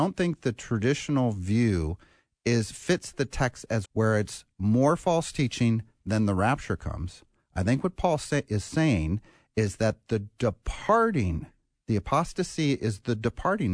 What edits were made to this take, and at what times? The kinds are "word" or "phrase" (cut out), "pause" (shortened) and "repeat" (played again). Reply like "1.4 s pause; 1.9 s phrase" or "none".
3.9 s word; 4.5 s pause